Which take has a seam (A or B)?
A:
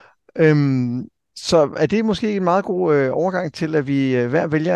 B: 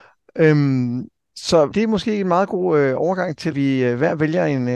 B